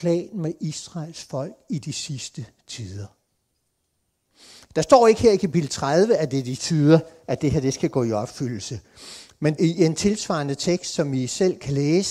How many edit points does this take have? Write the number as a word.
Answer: two